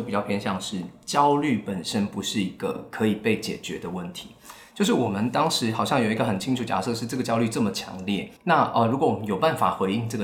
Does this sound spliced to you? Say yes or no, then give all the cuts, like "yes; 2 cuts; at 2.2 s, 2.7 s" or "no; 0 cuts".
yes; 1 cut; at 8.4 s